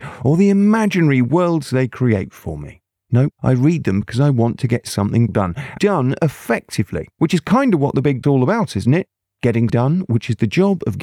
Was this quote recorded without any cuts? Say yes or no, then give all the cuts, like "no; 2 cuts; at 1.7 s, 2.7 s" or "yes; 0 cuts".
no; 6 cuts; at 3.4 s, 5.3 s, 5.8 s, 7.1 s, 8.2 s, 9.7 s